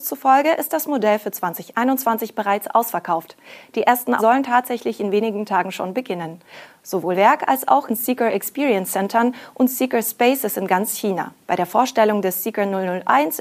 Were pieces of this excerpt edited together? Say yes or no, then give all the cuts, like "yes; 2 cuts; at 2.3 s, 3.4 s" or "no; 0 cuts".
yes; 4 cuts; at 4.2 s, 7.1 s, 7.9 s, 11.4 s